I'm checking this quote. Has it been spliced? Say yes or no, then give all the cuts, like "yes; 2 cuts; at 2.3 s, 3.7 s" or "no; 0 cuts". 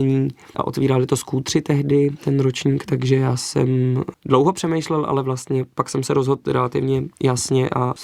no; 0 cuts